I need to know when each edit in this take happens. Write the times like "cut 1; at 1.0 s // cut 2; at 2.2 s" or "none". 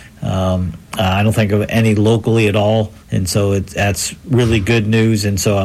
cut 1; at 3.0 s